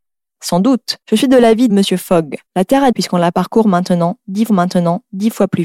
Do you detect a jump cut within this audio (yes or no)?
yes